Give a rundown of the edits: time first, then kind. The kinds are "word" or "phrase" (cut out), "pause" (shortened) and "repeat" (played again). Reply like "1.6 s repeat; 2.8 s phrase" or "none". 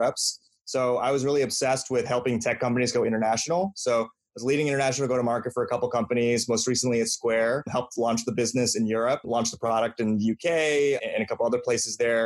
none